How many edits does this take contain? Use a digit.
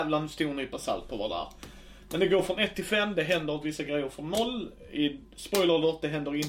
0